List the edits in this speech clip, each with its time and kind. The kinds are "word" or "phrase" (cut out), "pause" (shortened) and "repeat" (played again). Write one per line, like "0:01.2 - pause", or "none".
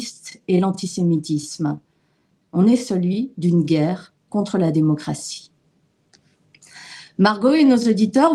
none